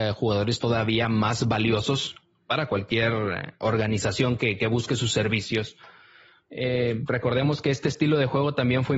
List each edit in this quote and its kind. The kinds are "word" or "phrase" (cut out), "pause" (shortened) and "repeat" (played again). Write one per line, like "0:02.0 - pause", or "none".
none